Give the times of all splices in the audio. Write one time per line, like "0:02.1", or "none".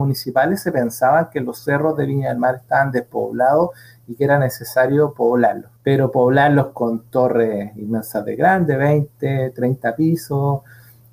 0:05.8